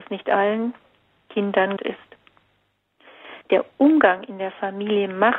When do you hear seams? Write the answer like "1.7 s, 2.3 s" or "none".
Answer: 1.8 s, 3.4 s